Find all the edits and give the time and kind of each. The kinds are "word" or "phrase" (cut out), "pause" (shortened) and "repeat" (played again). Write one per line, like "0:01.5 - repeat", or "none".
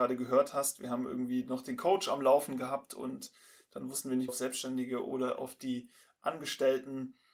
0:04.3 - phrase